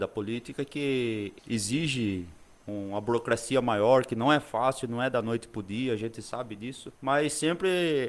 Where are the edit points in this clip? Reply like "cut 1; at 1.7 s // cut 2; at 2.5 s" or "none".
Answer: cut 1; at 1.4 s // cut 2; at 7.0 s